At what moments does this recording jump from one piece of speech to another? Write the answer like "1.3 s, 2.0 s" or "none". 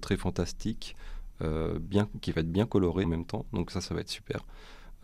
3.0 s